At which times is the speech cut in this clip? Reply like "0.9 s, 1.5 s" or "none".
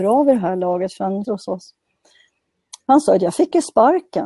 1.2 s